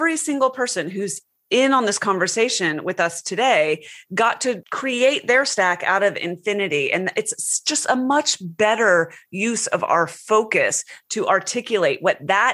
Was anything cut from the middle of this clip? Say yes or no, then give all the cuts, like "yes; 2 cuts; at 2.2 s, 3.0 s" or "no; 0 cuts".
no; 0 cuts